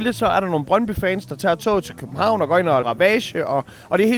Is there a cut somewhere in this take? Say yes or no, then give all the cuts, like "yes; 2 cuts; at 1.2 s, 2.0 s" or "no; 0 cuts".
yes; 1 cut; at 2.8 s